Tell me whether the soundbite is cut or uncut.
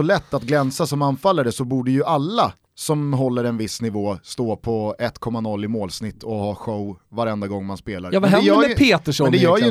uncut